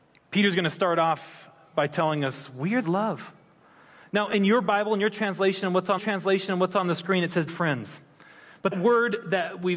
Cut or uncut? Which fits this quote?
cut